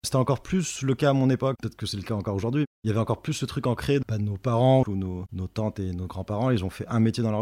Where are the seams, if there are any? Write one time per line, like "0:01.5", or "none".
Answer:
0:04.0
0:04.8